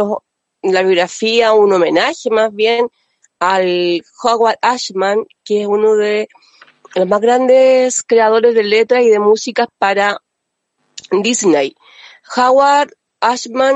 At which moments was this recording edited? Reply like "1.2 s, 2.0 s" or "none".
none